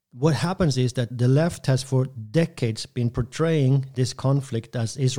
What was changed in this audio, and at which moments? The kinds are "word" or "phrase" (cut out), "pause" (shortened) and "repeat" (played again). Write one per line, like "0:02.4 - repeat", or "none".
0:01.1 - word